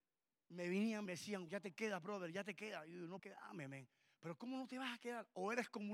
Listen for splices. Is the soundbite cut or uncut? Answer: cut